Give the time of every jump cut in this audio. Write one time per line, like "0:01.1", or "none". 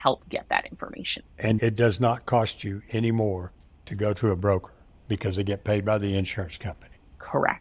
0:01.6